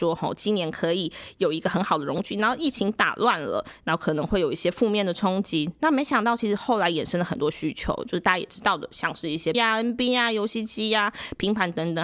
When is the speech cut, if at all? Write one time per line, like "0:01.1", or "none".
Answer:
0:09.5